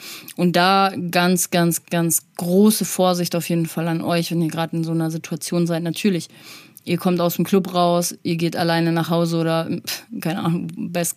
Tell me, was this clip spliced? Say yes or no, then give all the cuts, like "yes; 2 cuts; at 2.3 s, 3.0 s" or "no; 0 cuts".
no; 0 cuts